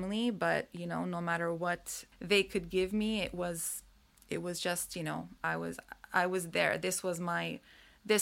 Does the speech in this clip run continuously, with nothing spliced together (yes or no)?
yes